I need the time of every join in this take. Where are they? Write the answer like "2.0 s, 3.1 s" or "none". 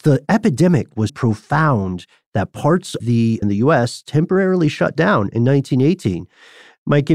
1.1 s, 3.0 s, 3.4 s